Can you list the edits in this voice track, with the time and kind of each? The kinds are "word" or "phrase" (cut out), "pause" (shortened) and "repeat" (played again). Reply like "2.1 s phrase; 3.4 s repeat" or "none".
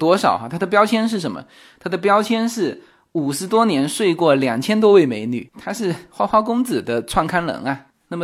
none